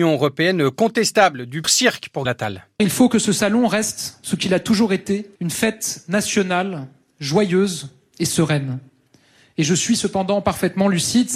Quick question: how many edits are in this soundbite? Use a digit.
3